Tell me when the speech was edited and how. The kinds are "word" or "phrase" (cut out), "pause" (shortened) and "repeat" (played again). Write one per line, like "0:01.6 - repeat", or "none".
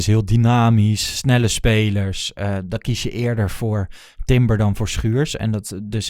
none